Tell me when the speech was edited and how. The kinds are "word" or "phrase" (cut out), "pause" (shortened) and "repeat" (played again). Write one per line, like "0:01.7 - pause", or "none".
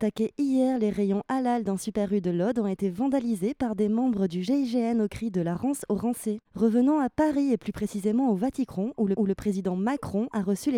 0:09.2 - repeat